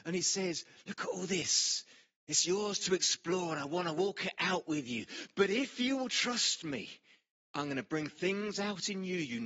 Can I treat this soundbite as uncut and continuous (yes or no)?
yes